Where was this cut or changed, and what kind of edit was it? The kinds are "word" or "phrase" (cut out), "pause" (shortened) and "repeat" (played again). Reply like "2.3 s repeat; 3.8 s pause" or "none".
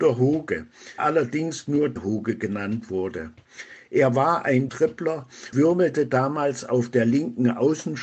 1.0 s word; 2.0 s word; 4.7 s word; 5.5 s word